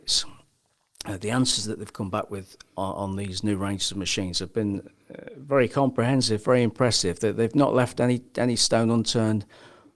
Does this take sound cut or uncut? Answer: uncut